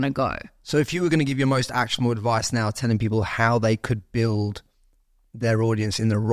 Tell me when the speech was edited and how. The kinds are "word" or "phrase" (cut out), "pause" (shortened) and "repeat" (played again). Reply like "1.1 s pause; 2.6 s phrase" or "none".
none